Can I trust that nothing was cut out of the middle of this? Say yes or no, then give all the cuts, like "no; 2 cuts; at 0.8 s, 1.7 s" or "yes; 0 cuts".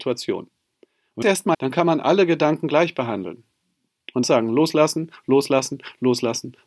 no; 3 cuts; at 1.2 s, 1.5 s, 4.2 s